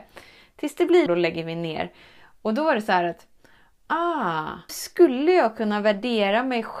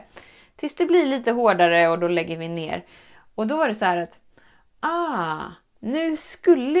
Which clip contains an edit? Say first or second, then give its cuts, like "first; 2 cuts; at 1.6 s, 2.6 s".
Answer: first; 2 cuts; at 1.1 s, 4.7 s